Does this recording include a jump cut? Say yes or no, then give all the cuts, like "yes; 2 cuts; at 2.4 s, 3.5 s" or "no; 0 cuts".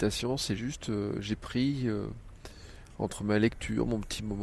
no; 0 cuts